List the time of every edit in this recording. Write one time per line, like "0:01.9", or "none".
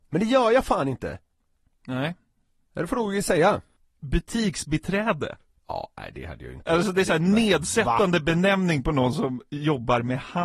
none